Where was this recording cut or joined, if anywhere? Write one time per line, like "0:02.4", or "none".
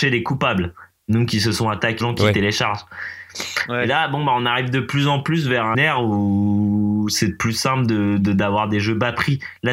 0:02.0
0:05.7